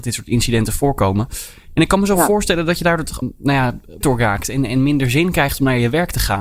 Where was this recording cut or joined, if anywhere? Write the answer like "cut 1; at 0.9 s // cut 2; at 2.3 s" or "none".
cut 1; at 3.2 s // cut 2; at 4.0 s